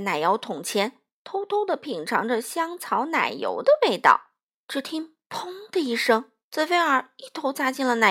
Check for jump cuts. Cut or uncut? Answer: cut